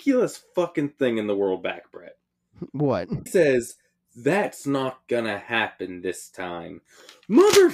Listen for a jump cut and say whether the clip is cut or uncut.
cut